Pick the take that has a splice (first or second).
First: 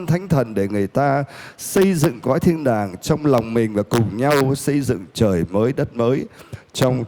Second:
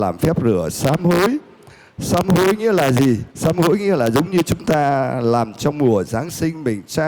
second